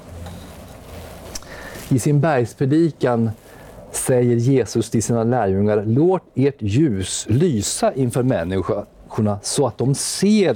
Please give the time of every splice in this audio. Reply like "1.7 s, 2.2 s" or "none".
none